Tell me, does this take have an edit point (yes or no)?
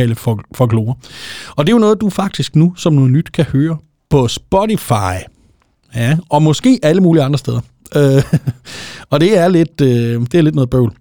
no